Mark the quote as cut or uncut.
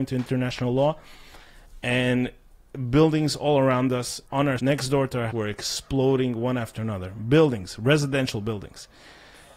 cut